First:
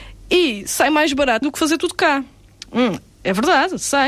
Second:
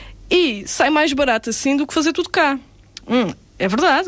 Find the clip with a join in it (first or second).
first